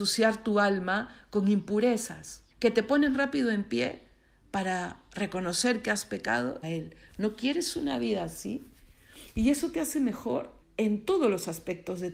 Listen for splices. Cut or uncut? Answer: cut